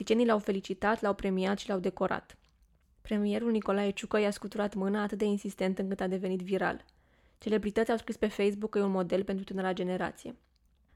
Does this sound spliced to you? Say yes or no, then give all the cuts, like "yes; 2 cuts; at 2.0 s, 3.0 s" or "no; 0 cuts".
no; 0 cuts